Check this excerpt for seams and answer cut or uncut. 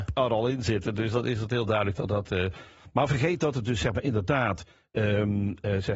uncut